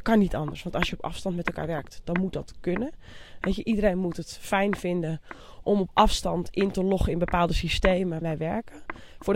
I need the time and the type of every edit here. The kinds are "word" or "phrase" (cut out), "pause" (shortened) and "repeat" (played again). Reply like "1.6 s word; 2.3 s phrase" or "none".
8.2 s word